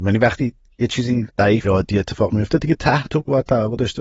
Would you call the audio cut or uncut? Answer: cut